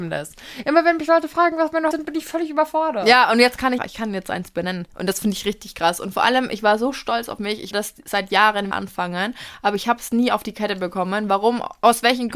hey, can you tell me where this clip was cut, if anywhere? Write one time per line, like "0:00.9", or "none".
0:01.9
0:03.8
0:07.7
0:08.7